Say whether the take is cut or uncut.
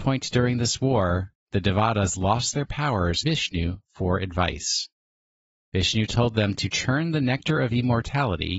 cut